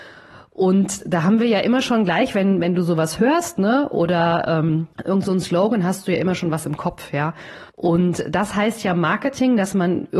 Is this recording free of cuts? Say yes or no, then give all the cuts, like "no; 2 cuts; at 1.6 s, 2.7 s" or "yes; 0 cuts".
no; 2 cuts; at 4.9 s, 7.7 s